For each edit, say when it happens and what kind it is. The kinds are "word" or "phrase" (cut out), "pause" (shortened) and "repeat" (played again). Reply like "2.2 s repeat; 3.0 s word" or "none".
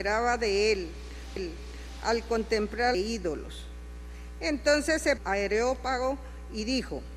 1.4 s repeat; 2.9 s phrase; 5.2 s phrase